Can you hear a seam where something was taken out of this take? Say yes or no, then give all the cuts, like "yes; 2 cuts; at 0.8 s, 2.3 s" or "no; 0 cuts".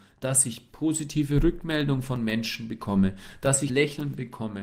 yes; 1 cut; at 3.7 s